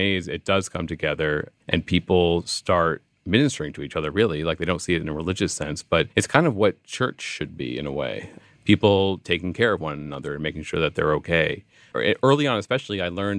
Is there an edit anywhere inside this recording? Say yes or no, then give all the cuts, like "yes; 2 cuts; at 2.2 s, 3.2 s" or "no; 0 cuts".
yes; 2 cuts; at 1.6 s, 6.1 s